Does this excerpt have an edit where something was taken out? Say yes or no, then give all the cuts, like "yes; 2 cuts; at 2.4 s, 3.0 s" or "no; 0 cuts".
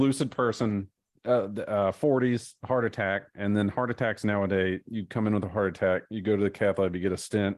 no; 0 cuts